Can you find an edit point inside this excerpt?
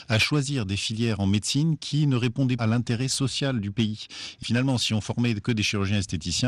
yes; 2 cuts; at 2.6 s, 4.4 s

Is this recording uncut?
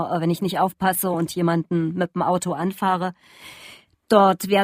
yes; 0 cuts

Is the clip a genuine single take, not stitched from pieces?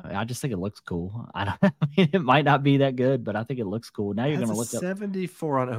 yes; 0 cuts

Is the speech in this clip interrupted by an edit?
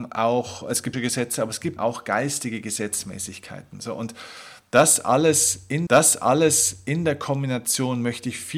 yes; 3 cuts; at 0.9 s, 1.8 s, 5.9 s

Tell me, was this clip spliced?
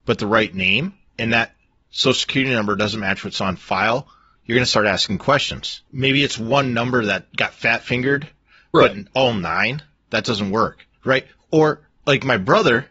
no; 0 cuts

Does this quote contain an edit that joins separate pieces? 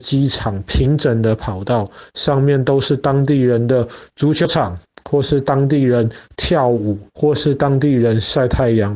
yes; 1 cut; at 7.1 s

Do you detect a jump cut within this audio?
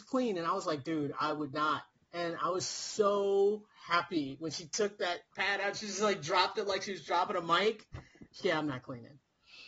yes; 3 cuts; at 1.9 s, 5.3 s, 8.4 s

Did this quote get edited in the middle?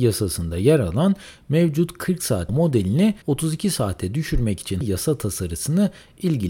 yes; 3 cuts; at 2.5 s, 3.2 s, 4.8 s

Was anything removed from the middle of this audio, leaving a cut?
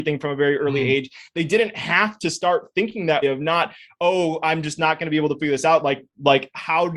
yes; 1 cut; at 3.2 s

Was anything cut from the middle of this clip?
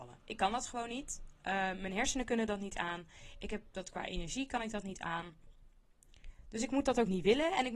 no; 0 cuts

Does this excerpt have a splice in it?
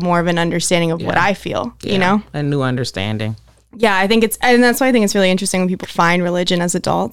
yes; 1 cut; at 5.8 s

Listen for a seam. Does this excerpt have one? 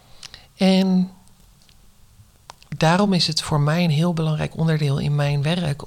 no; 0 cuts

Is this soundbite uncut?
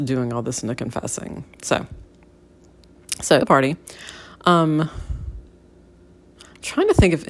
no; 1 cut; at 3.4 s

